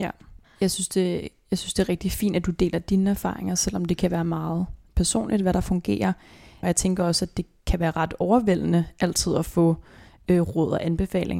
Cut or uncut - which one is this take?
uncut